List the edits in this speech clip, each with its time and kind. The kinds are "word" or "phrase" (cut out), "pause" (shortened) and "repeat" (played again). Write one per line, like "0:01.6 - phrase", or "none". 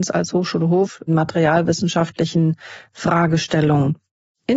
0:01.1 - phrase